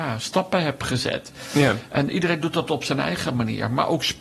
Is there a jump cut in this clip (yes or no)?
no